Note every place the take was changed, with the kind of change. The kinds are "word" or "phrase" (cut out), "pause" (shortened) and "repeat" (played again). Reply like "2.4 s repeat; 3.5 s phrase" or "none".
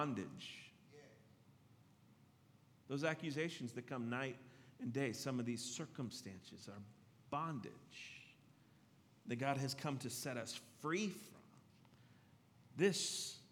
none